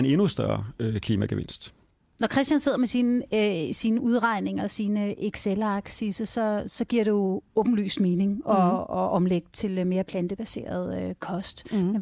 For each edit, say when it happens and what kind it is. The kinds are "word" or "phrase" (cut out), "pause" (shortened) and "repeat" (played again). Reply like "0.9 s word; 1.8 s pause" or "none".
none